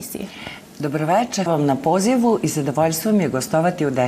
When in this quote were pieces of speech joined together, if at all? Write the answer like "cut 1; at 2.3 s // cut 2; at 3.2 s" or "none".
cut 1; at 1.5 s